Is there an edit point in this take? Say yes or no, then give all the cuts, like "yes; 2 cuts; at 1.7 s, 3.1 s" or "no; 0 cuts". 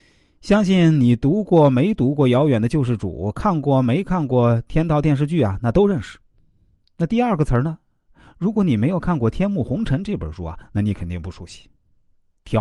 no; 0 cuts